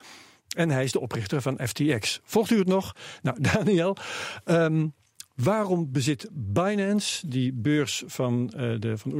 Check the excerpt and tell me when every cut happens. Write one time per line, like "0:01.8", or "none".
none